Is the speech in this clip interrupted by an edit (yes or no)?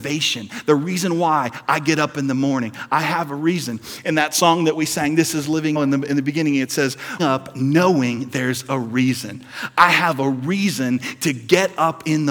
yes